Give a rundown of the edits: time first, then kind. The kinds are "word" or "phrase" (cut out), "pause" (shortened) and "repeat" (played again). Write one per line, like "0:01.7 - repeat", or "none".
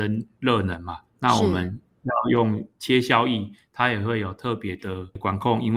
0:01.1 - pause